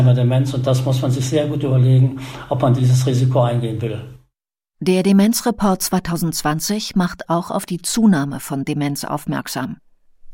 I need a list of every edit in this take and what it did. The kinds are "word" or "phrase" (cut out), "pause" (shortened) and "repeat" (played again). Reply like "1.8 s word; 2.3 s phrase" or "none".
none